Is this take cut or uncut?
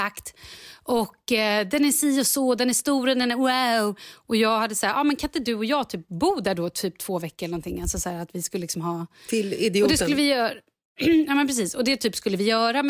uncut